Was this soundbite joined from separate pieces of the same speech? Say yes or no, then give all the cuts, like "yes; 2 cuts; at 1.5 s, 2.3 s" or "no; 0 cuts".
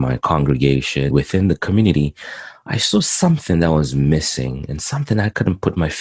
yes; 1 cut; at 1.1 s